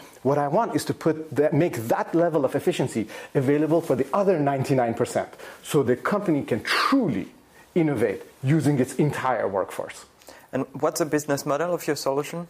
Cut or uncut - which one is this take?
uncut